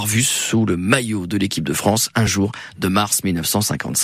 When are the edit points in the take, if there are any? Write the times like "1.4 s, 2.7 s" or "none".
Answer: none